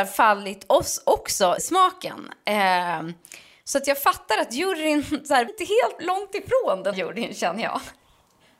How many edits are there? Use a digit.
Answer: 4